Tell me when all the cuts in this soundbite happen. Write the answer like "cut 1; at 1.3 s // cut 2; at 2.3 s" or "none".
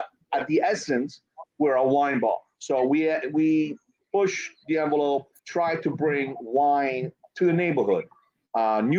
cut 1; at 1.5 s // cut 2; at 4.0 s // cut 3; at 5.4 s